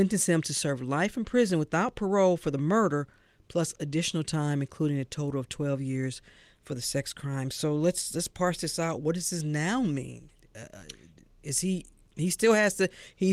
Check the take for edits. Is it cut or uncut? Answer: uncut